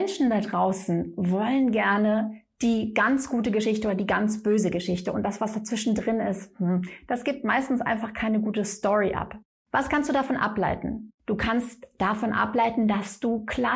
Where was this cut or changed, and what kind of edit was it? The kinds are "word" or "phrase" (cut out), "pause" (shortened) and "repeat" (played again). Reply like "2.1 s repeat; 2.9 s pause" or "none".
9.4 s pause; 11.2 s pause